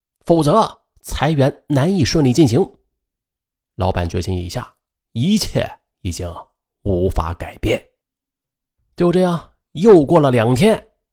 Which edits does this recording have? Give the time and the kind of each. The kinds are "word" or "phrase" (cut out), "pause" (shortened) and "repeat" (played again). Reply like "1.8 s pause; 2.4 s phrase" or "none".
none